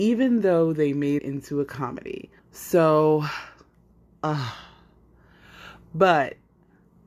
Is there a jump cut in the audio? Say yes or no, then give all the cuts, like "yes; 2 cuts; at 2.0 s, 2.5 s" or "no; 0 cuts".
yes; 2 cuts; at 1.2 s, 2.4 s